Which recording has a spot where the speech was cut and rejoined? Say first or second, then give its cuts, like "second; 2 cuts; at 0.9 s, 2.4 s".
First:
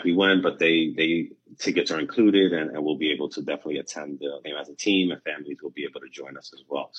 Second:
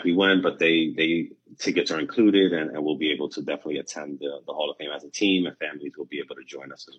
first; 1 cut; at 4.4 s